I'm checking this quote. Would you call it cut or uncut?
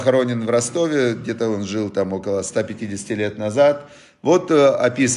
uncut